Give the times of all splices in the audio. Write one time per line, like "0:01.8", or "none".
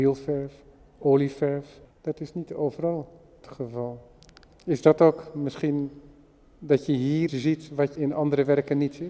0:01.9
0:03.4
0:07.3
0:08.0